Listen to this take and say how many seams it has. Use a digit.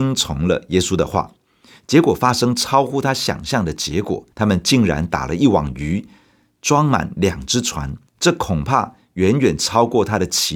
2